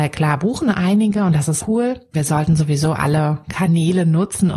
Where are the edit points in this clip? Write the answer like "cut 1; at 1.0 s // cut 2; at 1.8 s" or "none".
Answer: cut 1; at 1.6 s // cut 2; at 2.1 s